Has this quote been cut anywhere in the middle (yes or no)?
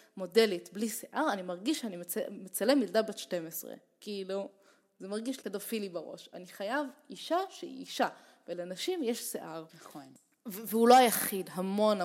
yes